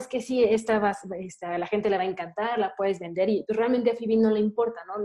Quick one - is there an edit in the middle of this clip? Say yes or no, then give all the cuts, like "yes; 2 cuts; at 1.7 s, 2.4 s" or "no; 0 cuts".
no; 0 cuts